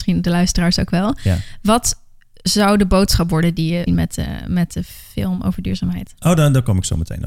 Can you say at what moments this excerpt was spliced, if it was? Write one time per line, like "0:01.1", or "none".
0:03.9